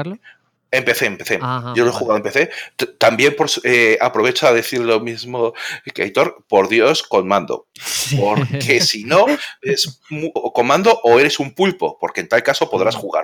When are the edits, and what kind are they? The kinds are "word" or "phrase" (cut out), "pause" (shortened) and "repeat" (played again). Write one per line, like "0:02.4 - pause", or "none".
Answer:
0:07.7 - pause
0:10.4 - word